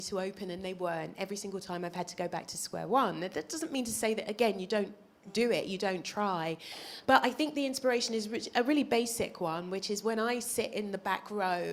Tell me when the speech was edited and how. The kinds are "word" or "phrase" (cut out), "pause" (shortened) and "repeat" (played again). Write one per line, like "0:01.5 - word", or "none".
none